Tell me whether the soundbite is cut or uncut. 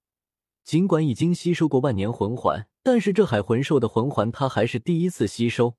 cut